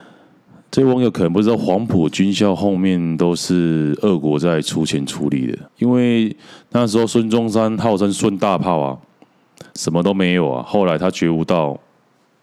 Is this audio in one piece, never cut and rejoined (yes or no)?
no